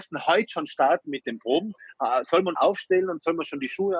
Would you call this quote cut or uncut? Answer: cut